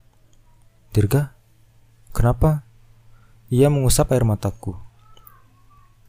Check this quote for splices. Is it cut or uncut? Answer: uncut